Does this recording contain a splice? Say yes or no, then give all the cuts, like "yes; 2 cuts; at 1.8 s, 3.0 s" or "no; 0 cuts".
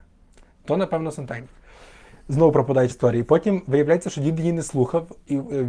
yes; 1 cut; at 2.9 s